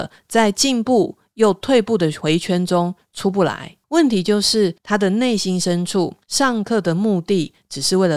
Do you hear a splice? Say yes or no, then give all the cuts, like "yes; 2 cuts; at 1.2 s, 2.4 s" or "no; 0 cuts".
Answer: yes; 3 cuts; at 3.8 s, 4.8 s, 6.2 s